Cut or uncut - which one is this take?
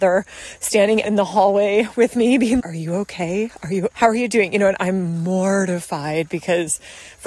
cut